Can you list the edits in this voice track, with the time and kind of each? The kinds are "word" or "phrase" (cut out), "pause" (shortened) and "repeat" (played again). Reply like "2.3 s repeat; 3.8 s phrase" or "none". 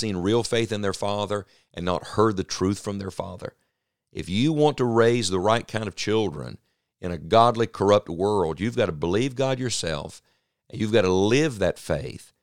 none